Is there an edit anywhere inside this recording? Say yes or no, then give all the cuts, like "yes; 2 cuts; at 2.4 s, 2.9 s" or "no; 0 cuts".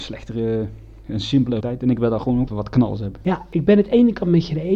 yes; 2 cuts; at 1.6 s, 2.5 s